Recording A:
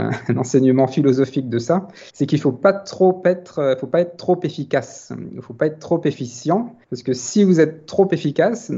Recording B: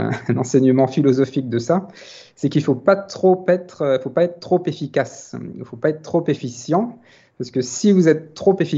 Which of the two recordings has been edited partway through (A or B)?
A